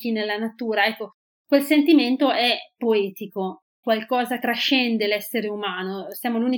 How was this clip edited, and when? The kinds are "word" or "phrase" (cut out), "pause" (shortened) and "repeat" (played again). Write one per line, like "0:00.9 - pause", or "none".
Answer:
0:03.8 - word
0:04.4 - word